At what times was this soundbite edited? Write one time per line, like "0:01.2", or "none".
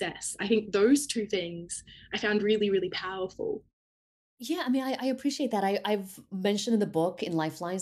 none

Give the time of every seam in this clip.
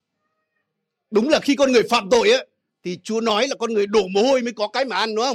none

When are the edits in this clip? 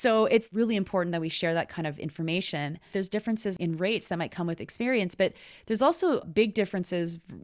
none

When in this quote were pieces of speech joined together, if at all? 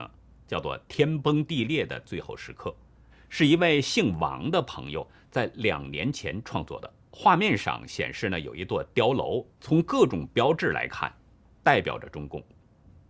0:03.1
0:07.0
0:09.6

